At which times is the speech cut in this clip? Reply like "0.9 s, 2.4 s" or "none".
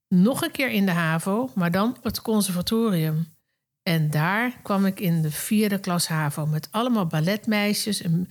2.0 s